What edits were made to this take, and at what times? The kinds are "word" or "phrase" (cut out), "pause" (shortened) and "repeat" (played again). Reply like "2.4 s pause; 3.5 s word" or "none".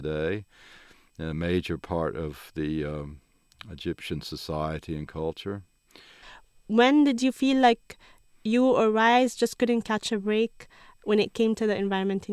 none